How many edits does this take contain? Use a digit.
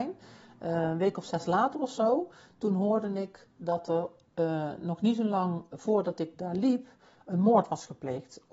0